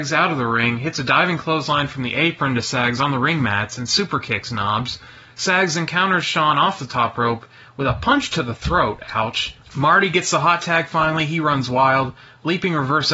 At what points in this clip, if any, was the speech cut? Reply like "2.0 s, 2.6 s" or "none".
none